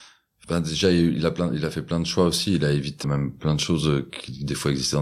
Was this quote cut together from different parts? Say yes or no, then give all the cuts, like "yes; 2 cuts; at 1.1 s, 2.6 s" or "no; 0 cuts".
yes; 1 cut; at 3.0 s